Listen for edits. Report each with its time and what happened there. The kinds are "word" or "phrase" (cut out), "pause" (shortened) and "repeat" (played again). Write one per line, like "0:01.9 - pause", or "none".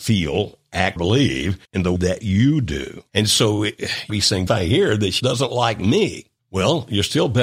0:01.0 - word
0:01.6 - pause
0:02.0 - word
0:03.1 - pause
0:04.1 - word
0:04.5 - phrase
0:05.2 - word
0:06.4 - pause